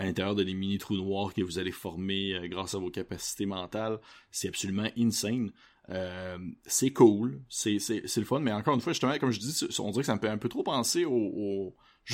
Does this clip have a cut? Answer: no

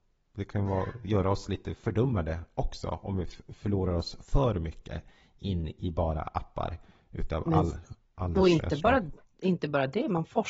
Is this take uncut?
yes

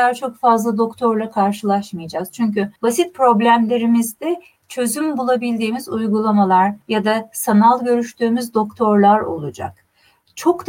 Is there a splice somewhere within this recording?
yes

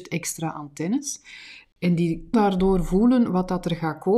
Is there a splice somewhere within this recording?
yes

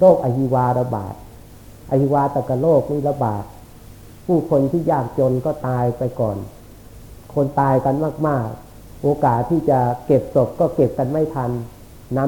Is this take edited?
yes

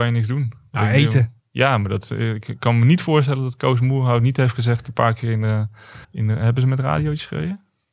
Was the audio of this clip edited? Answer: yes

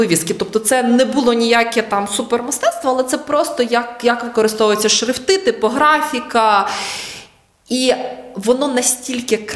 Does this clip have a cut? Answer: no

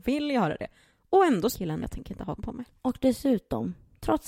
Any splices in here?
yes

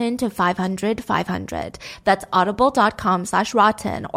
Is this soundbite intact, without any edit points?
yes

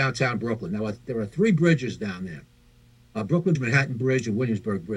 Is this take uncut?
no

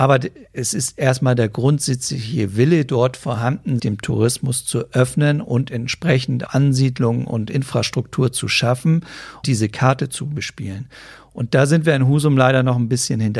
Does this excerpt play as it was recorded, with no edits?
no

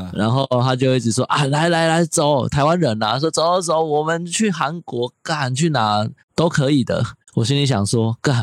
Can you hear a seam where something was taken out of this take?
no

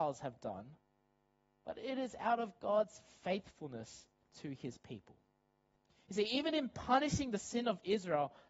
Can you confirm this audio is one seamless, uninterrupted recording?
yes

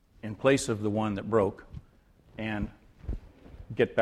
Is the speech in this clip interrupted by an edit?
no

